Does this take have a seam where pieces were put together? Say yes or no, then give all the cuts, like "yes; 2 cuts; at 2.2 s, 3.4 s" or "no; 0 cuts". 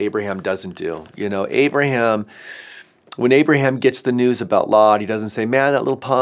no; 0 cuts